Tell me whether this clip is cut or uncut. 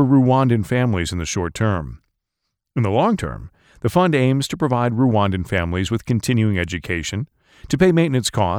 uncut